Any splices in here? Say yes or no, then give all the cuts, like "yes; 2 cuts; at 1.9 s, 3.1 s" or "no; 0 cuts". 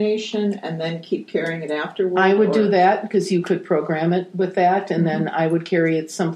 no; 0 cuts